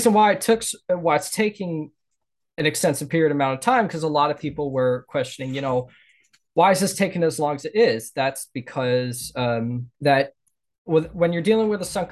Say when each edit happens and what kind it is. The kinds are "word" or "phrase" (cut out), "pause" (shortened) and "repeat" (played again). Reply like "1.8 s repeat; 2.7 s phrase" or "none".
9.9 s pause

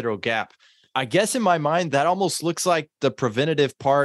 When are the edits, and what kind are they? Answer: none

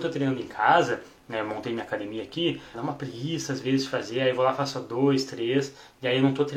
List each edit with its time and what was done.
2.7 s word

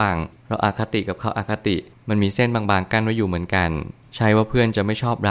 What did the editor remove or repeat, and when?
none

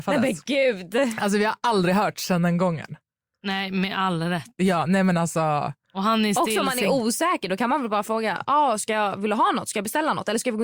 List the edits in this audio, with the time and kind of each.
none

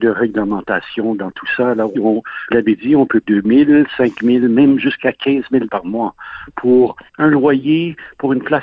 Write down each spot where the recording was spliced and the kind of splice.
1.9 s word; 2.5 s phrase; 3.2 s word; 5.7 s word; 7.1 s pause

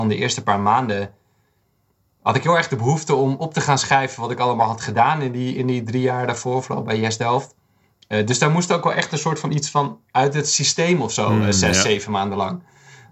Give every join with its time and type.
none

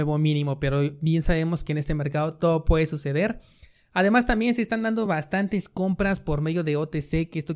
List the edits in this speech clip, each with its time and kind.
none

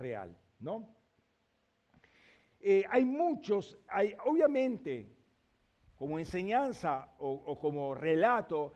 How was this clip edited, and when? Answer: 4.2 s word

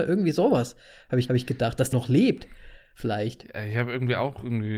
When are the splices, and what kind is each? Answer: 1.3 s repeat; 1.9 s word

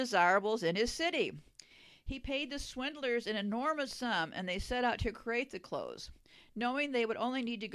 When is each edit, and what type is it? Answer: none

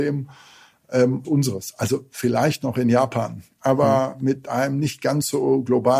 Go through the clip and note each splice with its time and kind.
1.2 s word

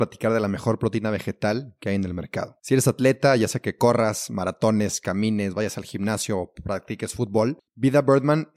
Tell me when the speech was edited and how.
2.6 s pause; 7.7 s pause

